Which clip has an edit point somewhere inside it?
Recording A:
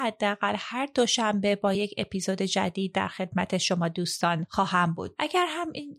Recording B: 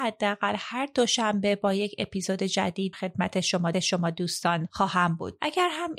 B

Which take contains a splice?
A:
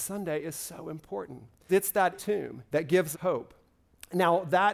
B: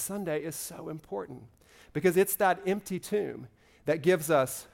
A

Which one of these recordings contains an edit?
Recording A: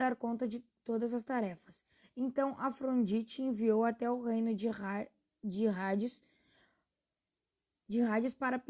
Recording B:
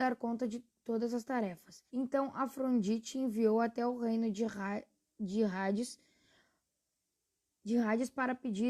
B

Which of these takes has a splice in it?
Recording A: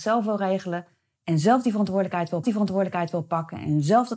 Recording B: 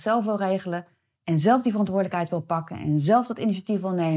A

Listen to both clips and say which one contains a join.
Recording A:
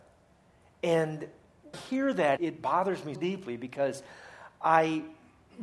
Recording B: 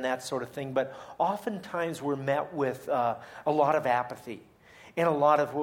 A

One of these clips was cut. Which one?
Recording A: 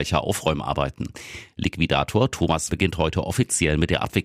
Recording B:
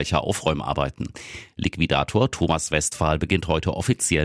A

